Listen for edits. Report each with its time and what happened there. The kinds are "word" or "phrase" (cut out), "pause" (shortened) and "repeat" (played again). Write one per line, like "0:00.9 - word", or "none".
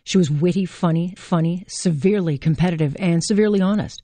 0:01.2 - repeat